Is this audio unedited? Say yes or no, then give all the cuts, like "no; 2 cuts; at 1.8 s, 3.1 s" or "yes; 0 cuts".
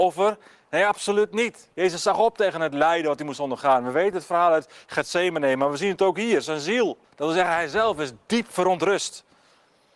no; 2 cuts; at 1.7 s, 7.0 s